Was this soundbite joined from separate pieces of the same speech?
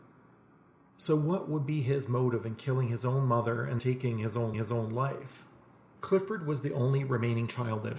yes; 2 cuts; at 3.8 s, 4.5 s

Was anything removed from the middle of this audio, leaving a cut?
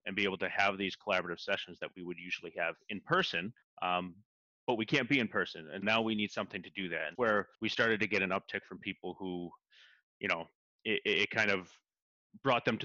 yes; 4 cuts; at 3.6 s, 5.8 s, 7.1 s, 7.5 s

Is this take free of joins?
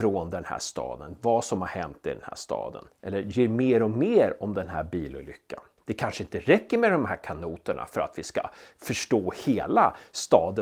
yes; 0 cuts

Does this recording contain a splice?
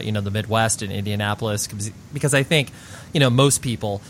no; 0 cuts

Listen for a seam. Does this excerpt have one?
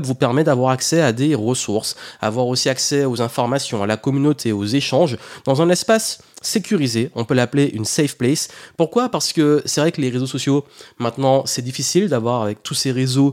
no; 0 cuts

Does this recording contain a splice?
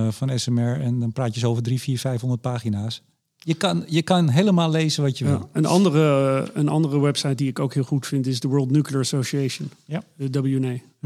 no; 0 cuts

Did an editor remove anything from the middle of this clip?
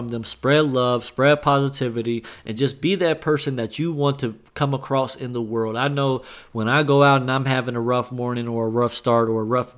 no; 0 cuts

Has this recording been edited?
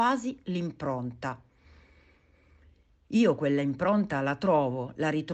no; 0 cuts

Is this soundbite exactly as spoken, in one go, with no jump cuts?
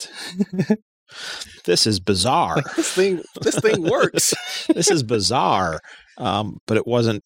yes; 0 cuts

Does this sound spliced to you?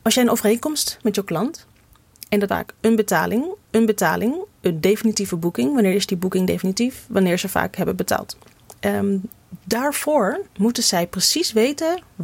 yes; 4 cuts; at 1.0 s, 2.5 s, 3.6 s, 10.5 s

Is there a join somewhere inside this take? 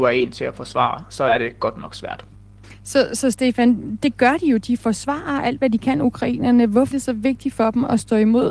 yes; 1 cut; at 6.9 s

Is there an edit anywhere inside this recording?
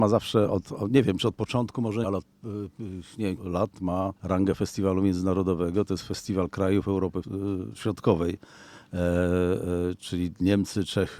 yes; 4 cuts; at 2.0 s, 3.4 s, 4.2 s, 7.2 s

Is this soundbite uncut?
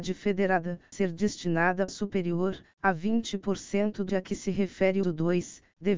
no; 4 cuts; at 0.9 s, 1.9 s, 4.1 s, 5.0 s

